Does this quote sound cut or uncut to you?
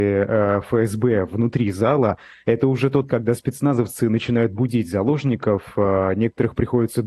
cut